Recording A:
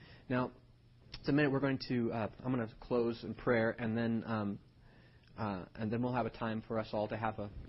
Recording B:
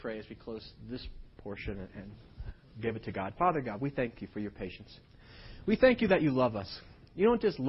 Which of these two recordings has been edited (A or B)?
A